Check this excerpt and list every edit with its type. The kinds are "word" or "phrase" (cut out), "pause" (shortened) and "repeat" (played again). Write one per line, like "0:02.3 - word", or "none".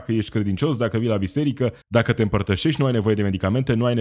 0:01.8 - pause